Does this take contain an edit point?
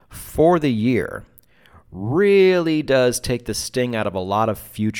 no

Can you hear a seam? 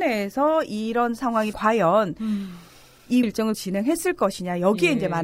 yes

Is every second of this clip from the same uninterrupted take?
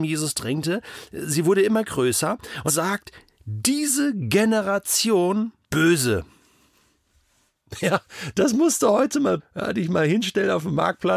no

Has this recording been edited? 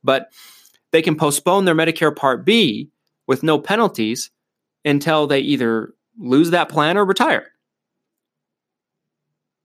no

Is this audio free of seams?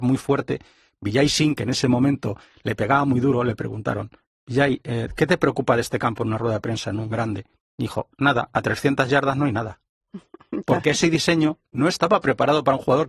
yes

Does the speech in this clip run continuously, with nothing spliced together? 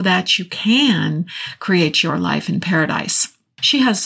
yes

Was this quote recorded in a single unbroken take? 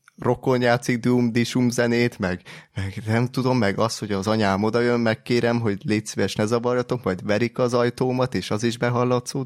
yes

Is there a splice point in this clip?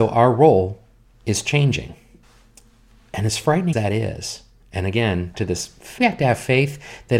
yes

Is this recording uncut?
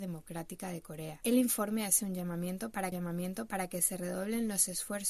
no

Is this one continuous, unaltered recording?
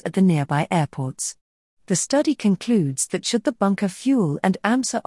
yes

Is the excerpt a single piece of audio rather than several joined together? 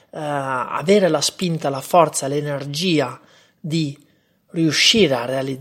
yes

